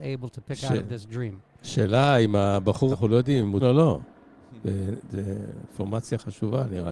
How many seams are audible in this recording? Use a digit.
2